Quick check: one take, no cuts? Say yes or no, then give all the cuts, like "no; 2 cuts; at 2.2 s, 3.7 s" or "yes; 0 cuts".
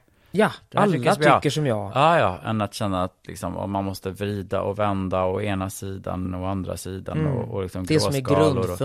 yes; 0 cuts